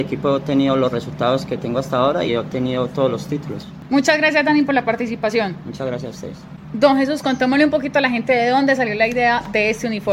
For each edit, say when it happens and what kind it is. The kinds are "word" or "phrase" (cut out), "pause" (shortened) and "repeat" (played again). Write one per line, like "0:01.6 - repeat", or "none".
0:02.3 - word